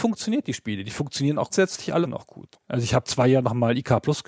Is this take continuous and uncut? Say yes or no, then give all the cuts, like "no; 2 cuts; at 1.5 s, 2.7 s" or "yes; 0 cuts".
no; 4 cuts; at 1.5 s, 2.0 s, 2.5 s, 3.0 s